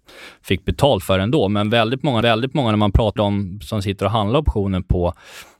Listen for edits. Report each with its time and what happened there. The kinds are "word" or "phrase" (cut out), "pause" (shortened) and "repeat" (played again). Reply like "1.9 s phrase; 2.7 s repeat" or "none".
2.2 s repeat; 3.2 s word